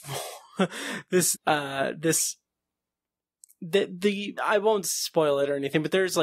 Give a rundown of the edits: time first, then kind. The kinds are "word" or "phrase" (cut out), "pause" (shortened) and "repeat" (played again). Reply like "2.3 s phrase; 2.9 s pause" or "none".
1.3 s word; 4.4 s phrase